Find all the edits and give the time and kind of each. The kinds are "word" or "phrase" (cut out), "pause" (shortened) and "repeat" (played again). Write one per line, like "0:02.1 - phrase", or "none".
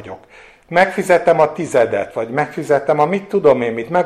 none